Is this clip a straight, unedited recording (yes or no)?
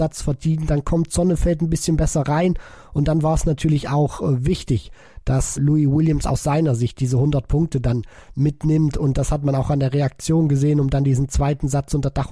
no